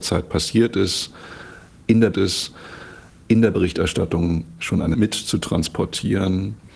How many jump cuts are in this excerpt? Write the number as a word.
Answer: two